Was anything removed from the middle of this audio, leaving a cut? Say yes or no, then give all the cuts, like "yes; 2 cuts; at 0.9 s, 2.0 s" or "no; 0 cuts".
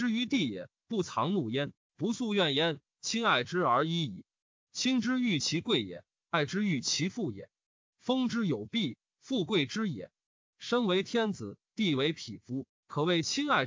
no; 0 cuts